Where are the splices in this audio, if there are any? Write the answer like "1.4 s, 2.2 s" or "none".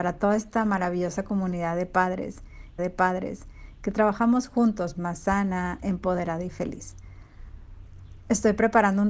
2.8 s, 5.0 s